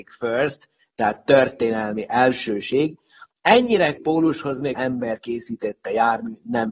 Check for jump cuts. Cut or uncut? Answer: cut